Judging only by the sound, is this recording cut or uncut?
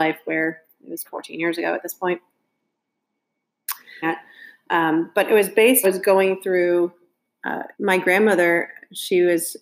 cut